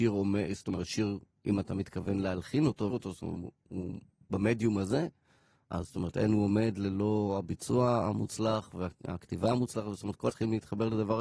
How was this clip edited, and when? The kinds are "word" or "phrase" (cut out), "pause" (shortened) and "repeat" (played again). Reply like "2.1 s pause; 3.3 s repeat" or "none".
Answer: 2.9 s word; 3.4 s word; 10.3 s word